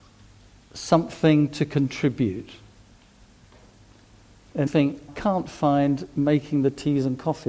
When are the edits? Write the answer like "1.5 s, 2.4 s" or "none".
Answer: 4.7 s, 5.1 s

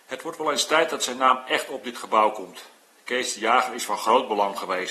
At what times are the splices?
none

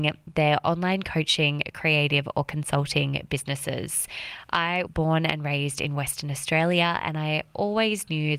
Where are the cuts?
4.9 s

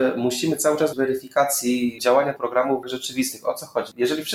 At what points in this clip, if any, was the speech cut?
0.9 s, 2.0 s, 2.4 s, 2.8 s

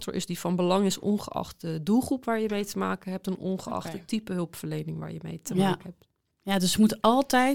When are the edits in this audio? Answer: none

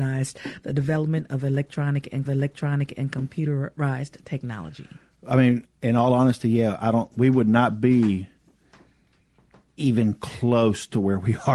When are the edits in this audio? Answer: 2.3 s

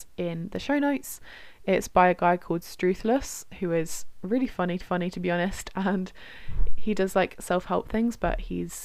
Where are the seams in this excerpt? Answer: 4.8 s

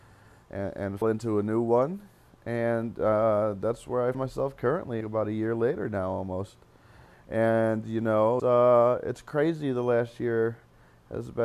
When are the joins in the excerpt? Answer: 1.0 s, 4.1 s, 5.0 s, 8.4 s

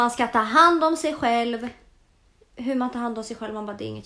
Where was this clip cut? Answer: 2.3 s

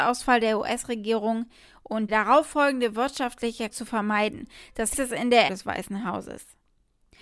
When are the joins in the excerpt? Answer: 2.1 s, 3.7 s, 4.9 s, 5.5 s

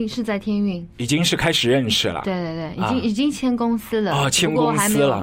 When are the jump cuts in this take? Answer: none

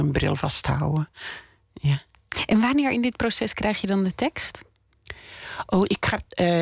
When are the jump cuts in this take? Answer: none

